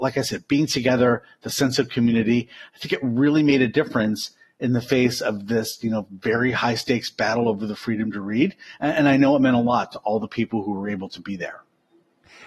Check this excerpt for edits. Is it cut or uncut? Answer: uncut